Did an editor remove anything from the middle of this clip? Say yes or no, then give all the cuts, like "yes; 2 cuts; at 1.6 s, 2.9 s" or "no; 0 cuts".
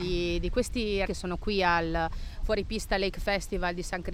yes; 1 cut; at 1.1 s